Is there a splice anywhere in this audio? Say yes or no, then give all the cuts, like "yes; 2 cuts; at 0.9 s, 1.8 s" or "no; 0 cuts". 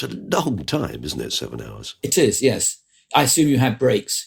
no; 0 cuts